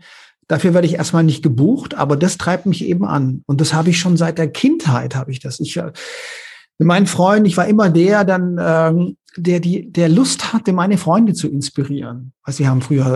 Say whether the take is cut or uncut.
uncut